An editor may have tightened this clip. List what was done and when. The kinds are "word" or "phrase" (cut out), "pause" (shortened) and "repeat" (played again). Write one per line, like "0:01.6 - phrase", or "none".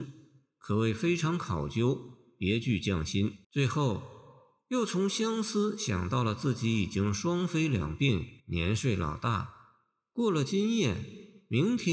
0:03.4 - pause
0:08.4 - pause

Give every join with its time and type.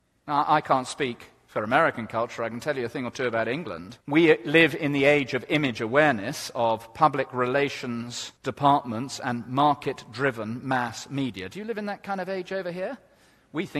0:04.0 - pause
0:08.4 - pause

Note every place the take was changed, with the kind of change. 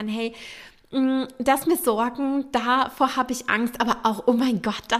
0:01.6 - word

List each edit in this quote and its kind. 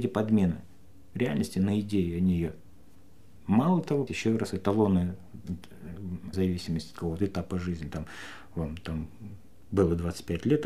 0:04.1 - word
0:06.3 - phrase

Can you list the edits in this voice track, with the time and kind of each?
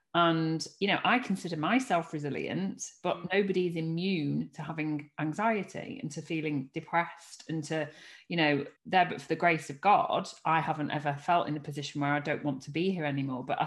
0:08.8 - pause

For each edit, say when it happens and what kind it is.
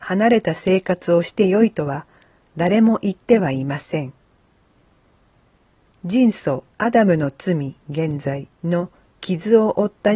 0:07.8 - pause
0:08.5 - pause

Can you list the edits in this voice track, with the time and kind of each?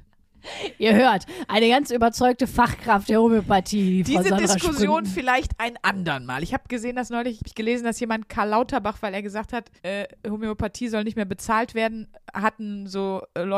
0:07.4 - word
0:09.8 - pause

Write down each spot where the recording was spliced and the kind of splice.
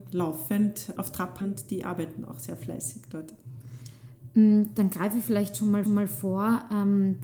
0:01.0 - word
0:01.4 - word
0:05.9 - repeat

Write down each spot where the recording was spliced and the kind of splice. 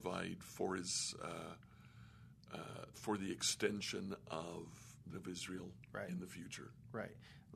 0:02.9 - word
0:05.1 - word

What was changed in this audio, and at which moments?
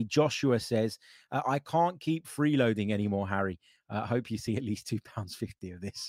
none

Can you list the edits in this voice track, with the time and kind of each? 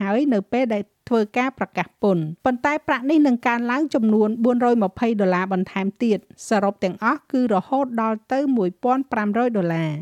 0:02.4 - pause

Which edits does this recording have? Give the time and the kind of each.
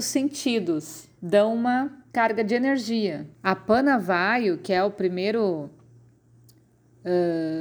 0:01.1 - pause
0:02.1 - pause
0:03.3 - pause

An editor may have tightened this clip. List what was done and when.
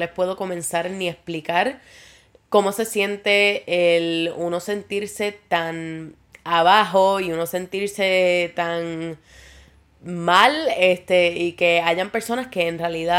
none

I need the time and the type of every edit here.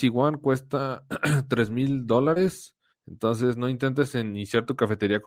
0:02.9 - pause

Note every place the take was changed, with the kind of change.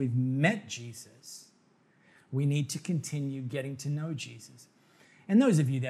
none

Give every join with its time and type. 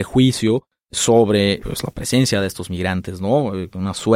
none

